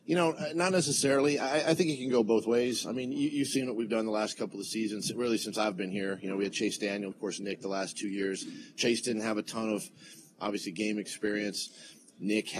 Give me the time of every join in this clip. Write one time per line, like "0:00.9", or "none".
0:07.1